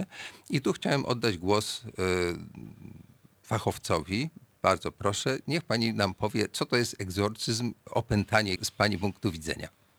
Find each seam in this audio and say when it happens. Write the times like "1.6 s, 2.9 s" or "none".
8.6 s